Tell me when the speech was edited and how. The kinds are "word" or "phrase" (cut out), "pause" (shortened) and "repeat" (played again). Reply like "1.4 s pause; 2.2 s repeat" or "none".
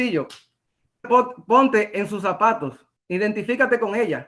1.0 s word; 3.0 s pause